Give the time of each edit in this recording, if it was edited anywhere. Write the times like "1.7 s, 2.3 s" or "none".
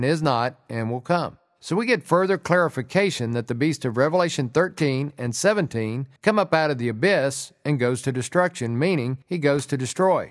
6.2 s, 9.2 s